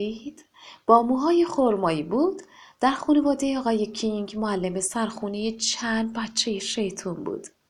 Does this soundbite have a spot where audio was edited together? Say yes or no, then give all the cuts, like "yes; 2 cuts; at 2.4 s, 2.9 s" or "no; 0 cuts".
no; 0 cuts